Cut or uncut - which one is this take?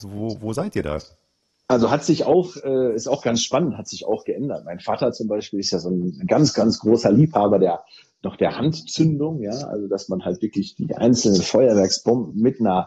uncut